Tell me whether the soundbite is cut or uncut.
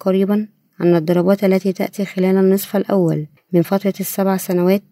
cut